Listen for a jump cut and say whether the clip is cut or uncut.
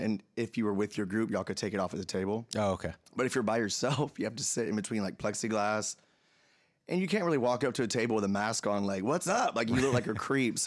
uncut